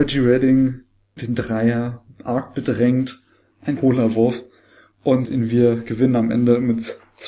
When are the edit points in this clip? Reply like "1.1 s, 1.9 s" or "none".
1.2 s, 3.8 s, 5.3 s